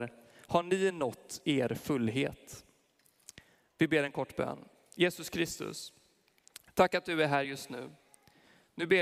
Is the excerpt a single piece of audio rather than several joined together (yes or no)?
yes